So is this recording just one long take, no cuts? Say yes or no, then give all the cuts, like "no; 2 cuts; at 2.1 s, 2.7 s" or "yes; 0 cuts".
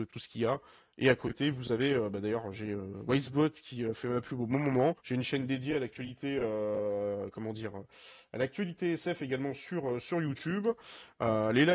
no; 1 cut; at 5.0 s